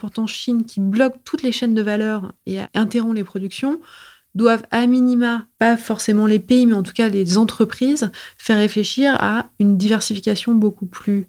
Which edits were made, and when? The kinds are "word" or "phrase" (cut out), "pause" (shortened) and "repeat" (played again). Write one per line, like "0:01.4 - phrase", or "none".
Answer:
none